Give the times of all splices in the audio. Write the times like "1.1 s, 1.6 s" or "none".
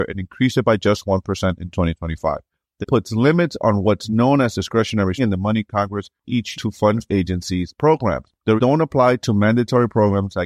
2.8 s, 5.2 s, 6.2 s, 6.5 s, 7.1 s, 7.8 s, 8.6 s

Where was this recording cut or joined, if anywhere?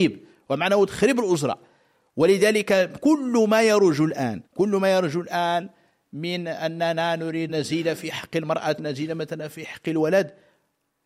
4.5 s, 7.5 s, 8.8 s

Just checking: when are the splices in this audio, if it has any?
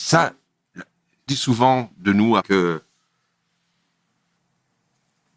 1.3 s, 2.4 s

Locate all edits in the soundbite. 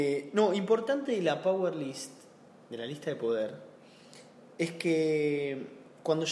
none

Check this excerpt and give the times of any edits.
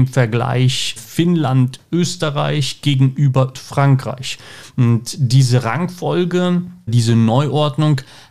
1.0 s, 3.5 s, 6.9 s

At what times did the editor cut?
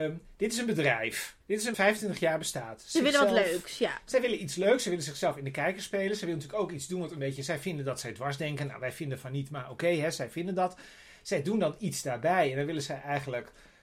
1.4 s, 1.7 s, 2.9 s

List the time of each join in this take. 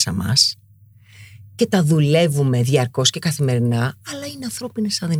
none

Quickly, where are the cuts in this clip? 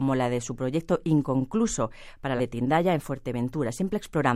2.4 s

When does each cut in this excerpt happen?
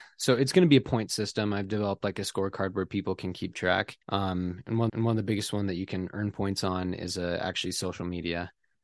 4.0 s, 4.9 s

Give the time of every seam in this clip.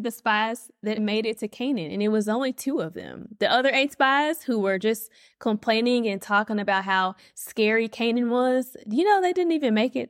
1.0 s

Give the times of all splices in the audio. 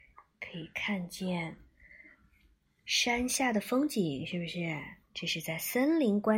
5.0 s

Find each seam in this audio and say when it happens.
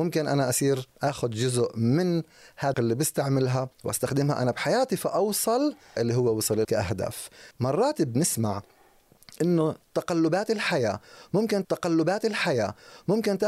0.9 s, 2.7 s, 3.7 s, 6.0 s, 6.6 s, 7.5 s, 11.6 s

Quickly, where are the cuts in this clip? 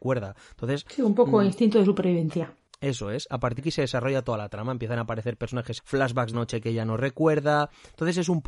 3.6 s, 5.8 s, 6.3 s

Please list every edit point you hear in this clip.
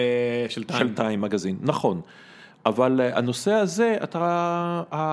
none

